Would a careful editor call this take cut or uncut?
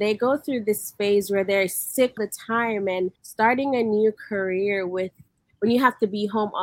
cut